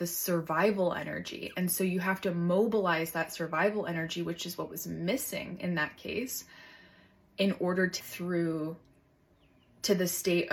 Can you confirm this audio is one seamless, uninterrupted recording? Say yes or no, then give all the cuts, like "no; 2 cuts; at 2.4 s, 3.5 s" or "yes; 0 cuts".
no; 1 cut; at 8.0 s